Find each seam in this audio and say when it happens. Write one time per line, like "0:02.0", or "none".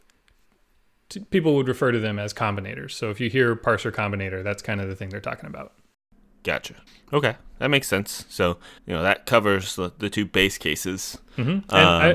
0:06.9
0:08.8